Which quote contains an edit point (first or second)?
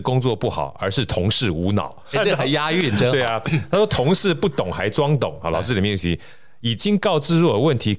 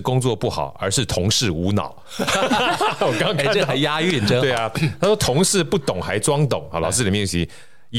first